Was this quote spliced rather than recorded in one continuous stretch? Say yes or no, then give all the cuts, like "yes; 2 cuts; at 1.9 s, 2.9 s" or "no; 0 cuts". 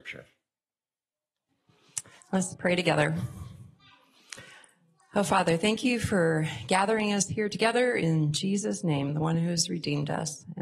no; 0 cuts